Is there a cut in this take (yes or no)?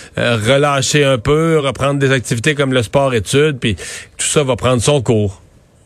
no